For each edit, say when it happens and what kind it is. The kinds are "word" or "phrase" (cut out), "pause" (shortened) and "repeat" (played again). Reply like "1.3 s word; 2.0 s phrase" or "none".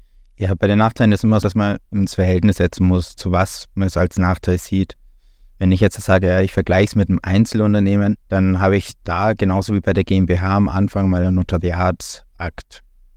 1.4 s word; 1.9 s pause; 8.2 s pause